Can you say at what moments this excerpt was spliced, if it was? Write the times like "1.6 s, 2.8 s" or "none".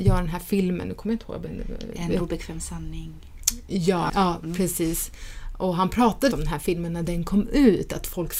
6.3 s